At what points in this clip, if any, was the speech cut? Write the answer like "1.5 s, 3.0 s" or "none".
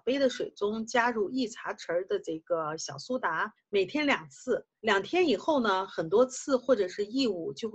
3.6 s, 4.8 s